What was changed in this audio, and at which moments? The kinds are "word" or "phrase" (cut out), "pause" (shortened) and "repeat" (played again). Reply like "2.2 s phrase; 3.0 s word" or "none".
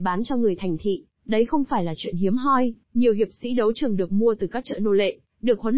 2.8 s pause